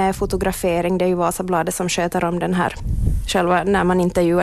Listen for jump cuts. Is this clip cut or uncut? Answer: uncut